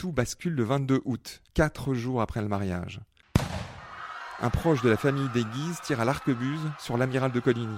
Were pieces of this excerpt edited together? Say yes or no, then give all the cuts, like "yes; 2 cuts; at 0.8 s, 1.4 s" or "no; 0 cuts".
yes; 1 cut; at 1.5 s